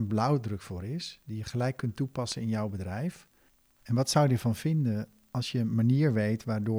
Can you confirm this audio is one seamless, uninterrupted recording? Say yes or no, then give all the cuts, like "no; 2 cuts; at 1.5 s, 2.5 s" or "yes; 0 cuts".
yes; 0 cuts